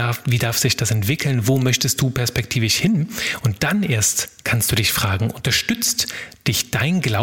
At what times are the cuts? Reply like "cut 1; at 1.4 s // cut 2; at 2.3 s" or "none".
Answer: none